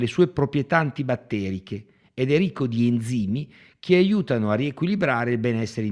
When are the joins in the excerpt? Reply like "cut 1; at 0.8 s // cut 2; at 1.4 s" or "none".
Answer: none